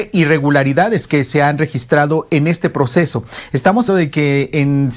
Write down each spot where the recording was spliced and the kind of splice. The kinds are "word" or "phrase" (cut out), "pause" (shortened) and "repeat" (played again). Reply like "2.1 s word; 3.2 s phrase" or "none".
3.9 s word